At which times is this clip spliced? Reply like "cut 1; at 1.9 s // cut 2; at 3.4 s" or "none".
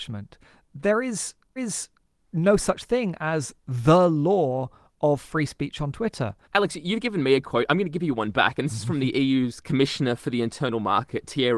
cut 1; at 1.6 s // cut 2; at 6.4 s